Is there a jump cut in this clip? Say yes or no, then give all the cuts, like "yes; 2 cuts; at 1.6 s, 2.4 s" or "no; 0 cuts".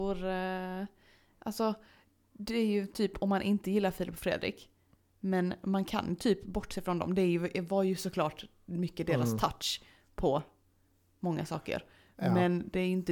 no; 0 cuts